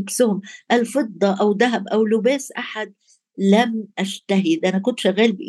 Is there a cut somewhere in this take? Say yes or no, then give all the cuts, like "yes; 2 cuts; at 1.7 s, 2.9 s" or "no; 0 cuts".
no; 0 cuts